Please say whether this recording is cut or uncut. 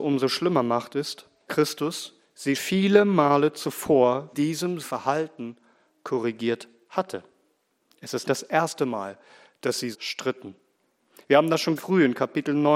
cut